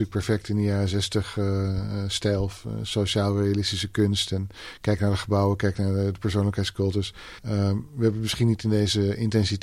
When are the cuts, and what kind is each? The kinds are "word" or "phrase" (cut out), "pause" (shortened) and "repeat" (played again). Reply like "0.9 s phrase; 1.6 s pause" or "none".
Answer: 7.4 s pause